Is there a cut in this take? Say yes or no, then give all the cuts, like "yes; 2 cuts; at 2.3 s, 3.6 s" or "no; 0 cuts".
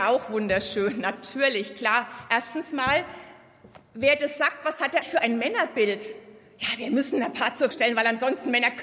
yes; 2 cuts; at 5.0 s, 7.7 s